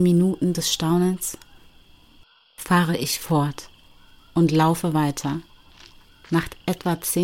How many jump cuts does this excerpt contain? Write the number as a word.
zero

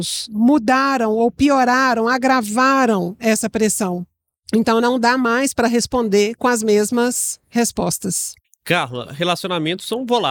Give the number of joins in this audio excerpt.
zero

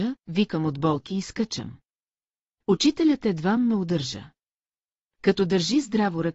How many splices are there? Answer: zero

